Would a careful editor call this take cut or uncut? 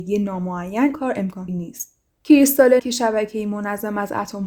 cut